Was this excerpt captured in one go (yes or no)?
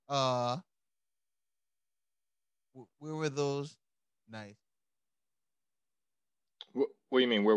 yes